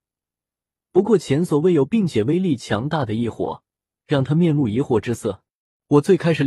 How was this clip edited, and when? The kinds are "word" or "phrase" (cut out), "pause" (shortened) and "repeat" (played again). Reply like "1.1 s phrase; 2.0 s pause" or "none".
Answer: none